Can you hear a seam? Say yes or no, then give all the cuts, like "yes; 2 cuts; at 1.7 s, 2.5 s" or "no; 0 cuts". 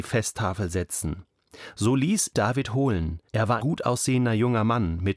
yes; 3 cuts; at 2.3 s, 3.3 s, 3.6 s